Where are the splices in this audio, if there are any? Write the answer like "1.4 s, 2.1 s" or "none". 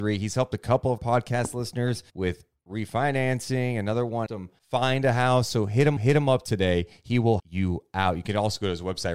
1.0 s, 2.1 s, 4.3 s, 4.6 s, 6.0 s, 7.4 s